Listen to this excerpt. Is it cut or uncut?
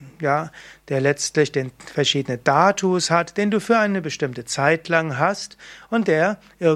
uncut